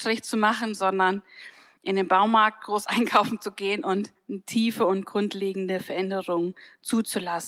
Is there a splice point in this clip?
no; 0 cuts

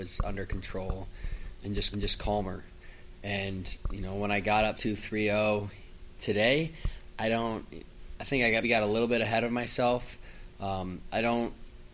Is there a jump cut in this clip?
yes; 4 cuts; at 1.6 s, 1.9 s, 4.7 s, 8.6 s

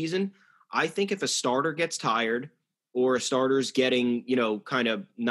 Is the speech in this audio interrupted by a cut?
no; 0 cuts

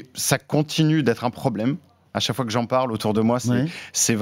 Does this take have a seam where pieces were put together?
no; 0 cuts

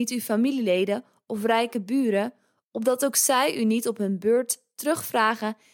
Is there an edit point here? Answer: no; 0 cuts

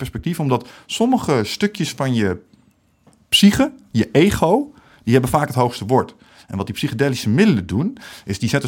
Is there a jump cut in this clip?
no; 0 cuts

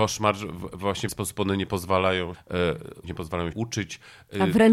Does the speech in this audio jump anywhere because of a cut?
yes; 4 cuts; at 1.1 s, 2.3 s, 3.0 s, 3.5 s

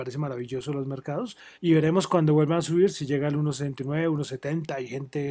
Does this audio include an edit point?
yes; 1 cut; at 1.5 s

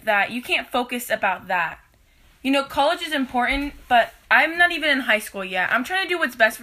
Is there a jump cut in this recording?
no; 0 cuts

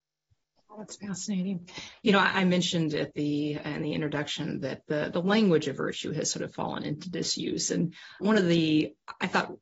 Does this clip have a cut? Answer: no; 0 cuts

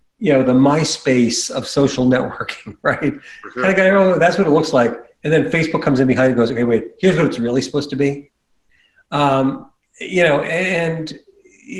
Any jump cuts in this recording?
no; 0 cuts

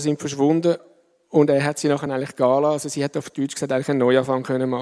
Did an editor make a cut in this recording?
no; 0 cuts

